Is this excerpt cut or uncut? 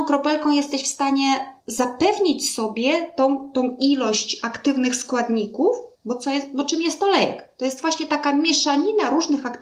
cut